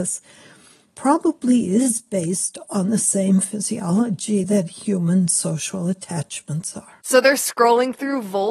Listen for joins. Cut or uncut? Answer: uncut